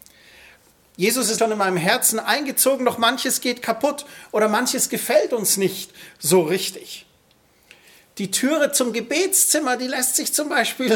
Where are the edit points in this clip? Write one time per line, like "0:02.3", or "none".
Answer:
0:01.4